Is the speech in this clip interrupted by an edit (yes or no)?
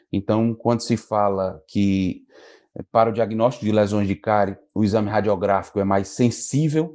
no